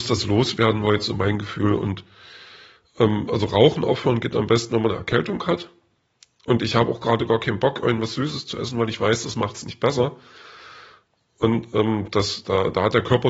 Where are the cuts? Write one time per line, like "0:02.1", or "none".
none